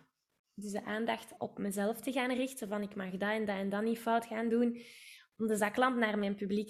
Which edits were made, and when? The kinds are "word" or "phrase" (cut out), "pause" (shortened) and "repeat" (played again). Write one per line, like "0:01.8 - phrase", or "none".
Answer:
0:01.4 - word